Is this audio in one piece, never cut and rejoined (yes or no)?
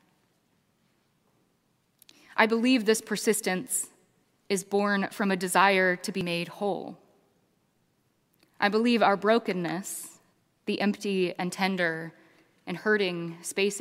yes